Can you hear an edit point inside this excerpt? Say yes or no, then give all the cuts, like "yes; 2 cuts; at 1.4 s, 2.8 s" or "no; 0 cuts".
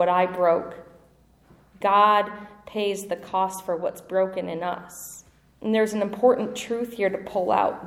no; 0 cuts